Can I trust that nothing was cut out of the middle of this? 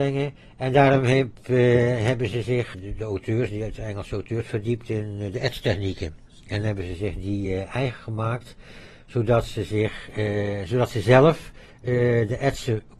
yes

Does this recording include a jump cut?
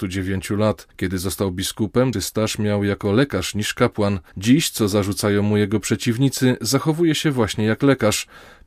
yes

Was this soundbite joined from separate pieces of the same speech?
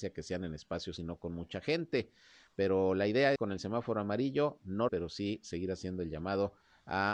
yes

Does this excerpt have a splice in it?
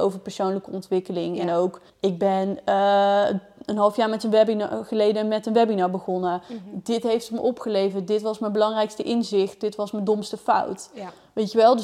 yes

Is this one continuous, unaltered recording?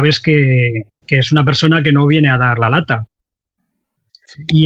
yes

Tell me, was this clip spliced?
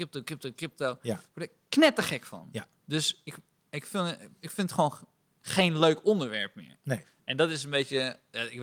yes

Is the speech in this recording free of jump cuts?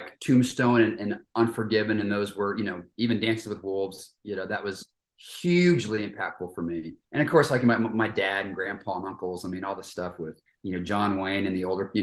no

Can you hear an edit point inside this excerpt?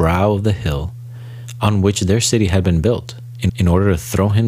yes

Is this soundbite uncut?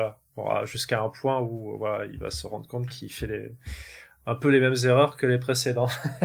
yes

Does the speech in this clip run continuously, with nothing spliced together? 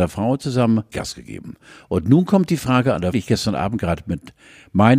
no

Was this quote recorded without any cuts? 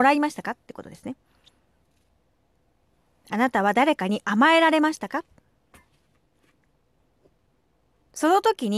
yes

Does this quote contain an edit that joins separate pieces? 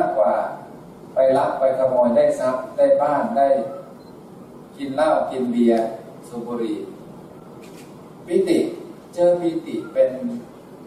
yes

